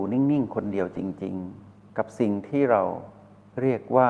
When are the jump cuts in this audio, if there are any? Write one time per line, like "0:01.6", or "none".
none